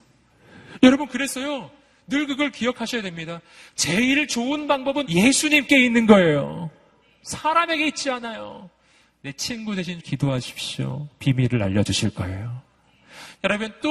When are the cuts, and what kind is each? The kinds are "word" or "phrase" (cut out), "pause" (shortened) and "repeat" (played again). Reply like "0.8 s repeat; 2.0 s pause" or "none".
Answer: 5.0 s word; 10.0 s word